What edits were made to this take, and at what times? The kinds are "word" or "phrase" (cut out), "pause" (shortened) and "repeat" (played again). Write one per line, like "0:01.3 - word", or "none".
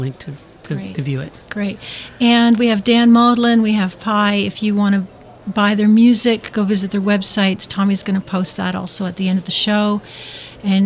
none